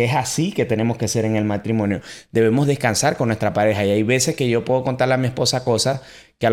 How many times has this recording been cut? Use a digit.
0